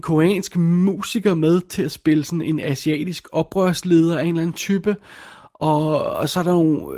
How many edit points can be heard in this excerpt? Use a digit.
0